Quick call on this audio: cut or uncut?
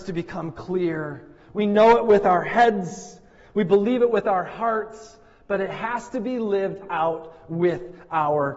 uncut